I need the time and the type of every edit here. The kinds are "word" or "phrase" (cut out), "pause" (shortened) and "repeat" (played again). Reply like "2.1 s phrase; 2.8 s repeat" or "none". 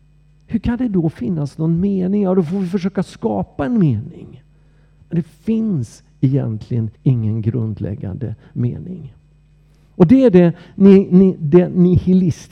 7.0 s pause